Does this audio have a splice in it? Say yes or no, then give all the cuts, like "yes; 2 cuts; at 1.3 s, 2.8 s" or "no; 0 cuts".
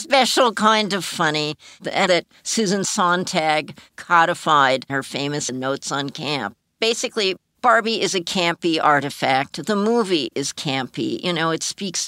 yes; 3 cuts; at 2.1 s, 4.9 s, 5.5 s